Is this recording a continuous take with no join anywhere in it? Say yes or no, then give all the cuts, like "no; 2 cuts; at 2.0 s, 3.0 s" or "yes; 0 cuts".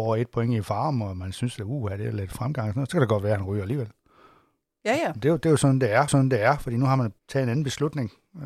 no; 2 cuts; at 6.1 s, 7.2 s